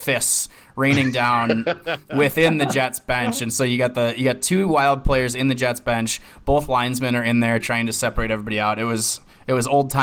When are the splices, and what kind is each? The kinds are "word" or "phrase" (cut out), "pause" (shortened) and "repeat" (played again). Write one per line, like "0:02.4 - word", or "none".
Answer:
none